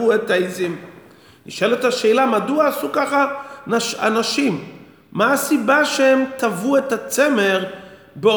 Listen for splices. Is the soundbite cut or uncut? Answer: uncut